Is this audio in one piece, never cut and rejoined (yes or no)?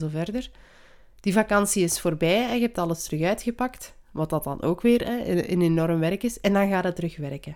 yes